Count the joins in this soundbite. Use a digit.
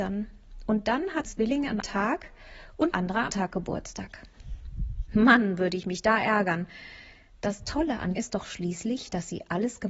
5